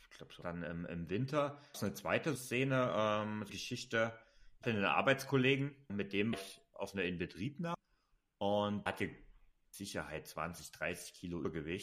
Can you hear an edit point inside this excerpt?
yes; 7 cuts; at 1.7 s, 2.4 s, 3.5 s, 4.6 s, 5.9 s, 6.3 s, 8.9 s

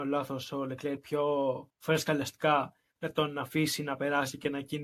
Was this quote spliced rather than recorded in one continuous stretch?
yes; 2 cuts; at 1.0 s, 1.7 s

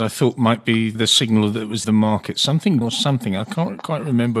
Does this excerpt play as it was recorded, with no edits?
no; 3 cuts; at 1.0 s, 1.8 s, 2.8 s

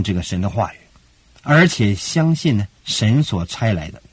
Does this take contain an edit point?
yes; 1 cut; at 2.8 s

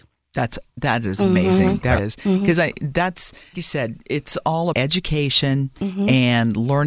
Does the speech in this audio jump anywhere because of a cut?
yes; 3 cuts; at 2.0 s, 3.5 s, 4.7 s

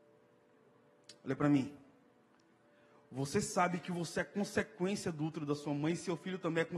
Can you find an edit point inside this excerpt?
no; 0 cuts

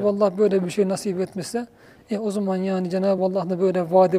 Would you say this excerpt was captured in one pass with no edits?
yes; 0 cuts

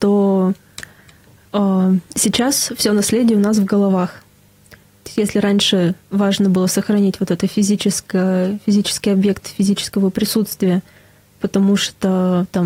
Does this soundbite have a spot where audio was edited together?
no; 0 cuts

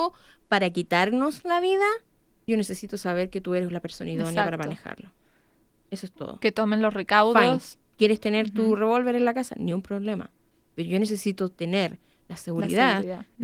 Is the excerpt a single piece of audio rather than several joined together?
no; 1 cut; at 2.5 s

